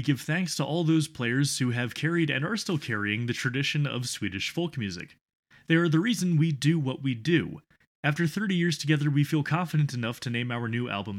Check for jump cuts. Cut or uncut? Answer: uncut